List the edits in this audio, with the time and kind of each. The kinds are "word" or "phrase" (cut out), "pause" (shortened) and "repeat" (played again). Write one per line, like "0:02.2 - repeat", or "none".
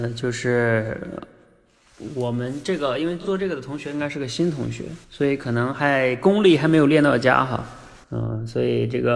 0:05.0 - pause
0:08.0 - pause